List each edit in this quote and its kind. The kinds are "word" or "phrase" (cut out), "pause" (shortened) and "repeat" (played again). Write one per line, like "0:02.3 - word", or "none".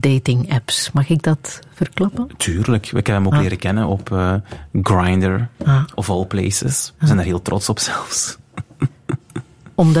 0:05.5 - pause